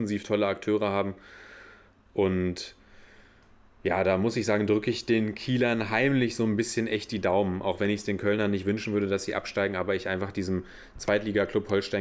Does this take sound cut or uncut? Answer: uncut